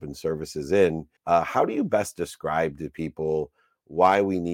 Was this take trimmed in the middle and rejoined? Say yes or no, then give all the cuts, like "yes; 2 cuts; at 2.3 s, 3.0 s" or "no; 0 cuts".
yes; 1 cut; at 1.2 s